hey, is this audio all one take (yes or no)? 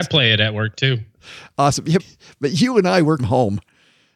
no